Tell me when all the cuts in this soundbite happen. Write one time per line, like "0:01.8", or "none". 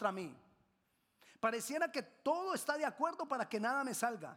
none